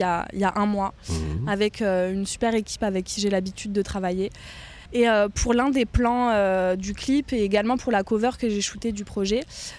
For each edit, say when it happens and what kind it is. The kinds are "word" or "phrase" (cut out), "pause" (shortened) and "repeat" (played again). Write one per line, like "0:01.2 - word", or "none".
0:04.9 - pause